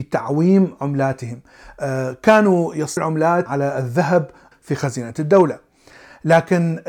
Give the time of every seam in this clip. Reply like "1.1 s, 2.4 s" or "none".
3.0 s, 3.5 s, 4.5 s